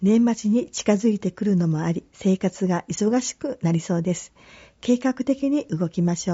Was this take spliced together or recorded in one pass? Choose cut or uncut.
cut